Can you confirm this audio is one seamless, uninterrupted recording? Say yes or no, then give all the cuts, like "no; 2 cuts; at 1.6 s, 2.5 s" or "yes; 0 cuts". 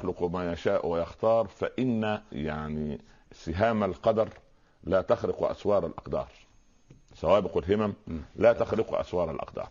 no; 1 cut; at 2.3 s